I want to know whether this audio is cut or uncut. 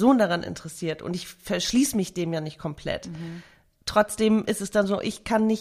uncut